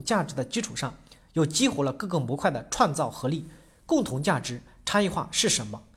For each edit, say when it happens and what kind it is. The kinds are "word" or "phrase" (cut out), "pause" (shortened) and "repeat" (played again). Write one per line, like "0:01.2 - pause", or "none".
none

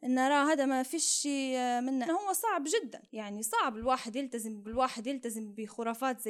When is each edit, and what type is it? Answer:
0:02.1 - phrase
0:03.1 - pause
0:04.6 - repeat

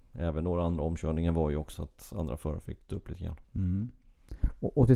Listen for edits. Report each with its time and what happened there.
0:01.7 - word
0:02.9 - word
0:03.4 - pause

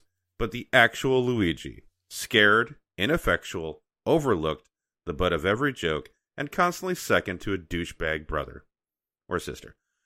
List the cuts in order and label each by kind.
none

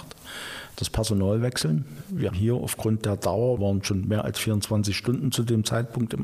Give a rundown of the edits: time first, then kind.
0:02.3 - word
0:03.6 - word

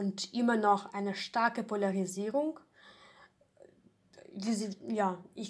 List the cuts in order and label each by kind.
none

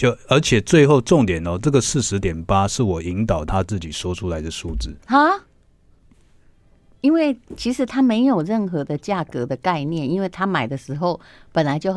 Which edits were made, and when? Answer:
0:05.0 - pause

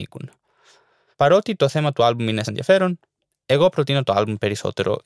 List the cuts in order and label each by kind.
0:02.4 - word

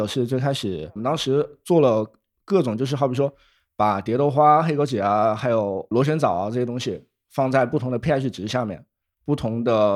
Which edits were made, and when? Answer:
none

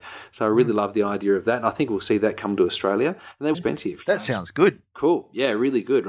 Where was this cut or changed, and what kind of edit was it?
0:03.5 - phrase

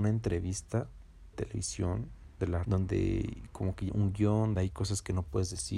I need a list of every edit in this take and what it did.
0:01.3 - word
0:02.6 - word
0:03.9 - word
0:04.5 - word

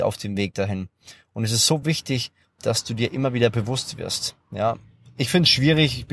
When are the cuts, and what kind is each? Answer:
none

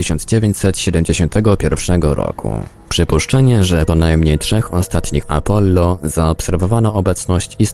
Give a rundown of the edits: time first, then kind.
0:03.9 - phrase
0:05.2 - word

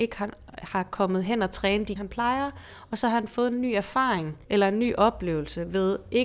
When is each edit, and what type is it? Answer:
0:02.0 - word
0:04.4 - pause

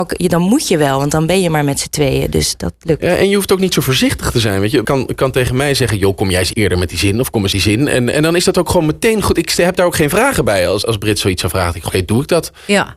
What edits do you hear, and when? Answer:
0:04.8 - word
0:06.5 - word
0:07.5 - phrase
0:10.8 - word
0:11.9 - word

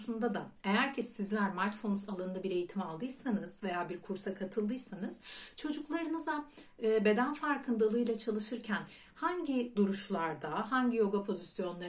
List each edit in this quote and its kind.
none

